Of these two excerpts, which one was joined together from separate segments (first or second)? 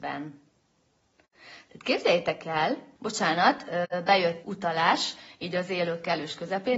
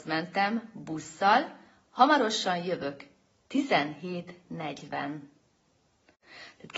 first